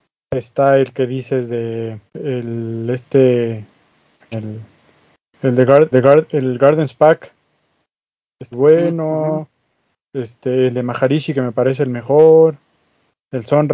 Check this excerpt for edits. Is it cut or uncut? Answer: cut